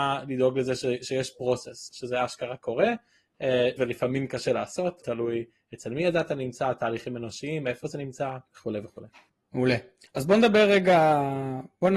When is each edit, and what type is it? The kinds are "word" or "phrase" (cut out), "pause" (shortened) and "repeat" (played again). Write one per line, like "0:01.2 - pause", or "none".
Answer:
0:01.9 - word
0:03.8 - phrase
0:05.0 - word
0:08.5 - pause